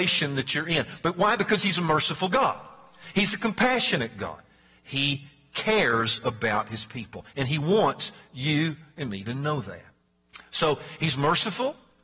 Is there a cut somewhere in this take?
no; 0 cuts

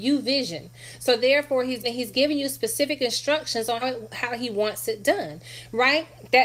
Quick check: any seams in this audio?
yes; 2 cuts; at 1.8 s, 3.8 s

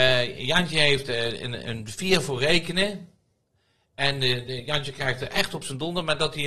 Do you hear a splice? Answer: no; 0 cuts

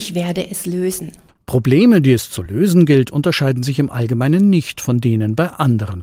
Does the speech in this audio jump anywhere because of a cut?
no; 0 cuts

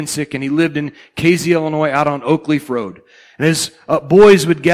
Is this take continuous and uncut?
yes; 0 cuts

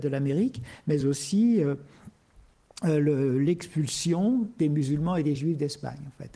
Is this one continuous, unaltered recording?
yes; 0 cuts

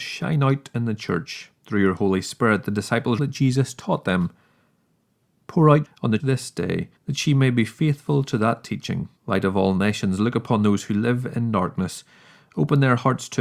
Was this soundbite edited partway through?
yes; 6 cuts; at 1.6 s, 3.2 s, 5.9 s, 6.2 s, 7.0 s, 9.2 s

